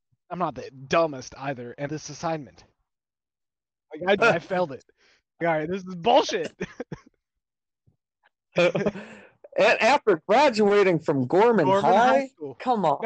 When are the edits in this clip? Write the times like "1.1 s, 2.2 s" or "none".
1.9 s, 4.2 s, 5.4 s